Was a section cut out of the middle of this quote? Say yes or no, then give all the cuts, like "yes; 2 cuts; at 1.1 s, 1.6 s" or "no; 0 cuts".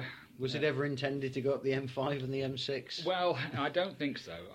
no; 0 cuts